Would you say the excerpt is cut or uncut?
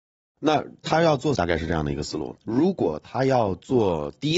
cut